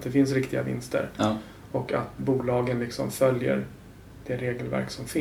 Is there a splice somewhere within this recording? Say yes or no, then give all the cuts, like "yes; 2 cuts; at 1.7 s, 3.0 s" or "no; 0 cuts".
yes; 1 cut; at 2.2 s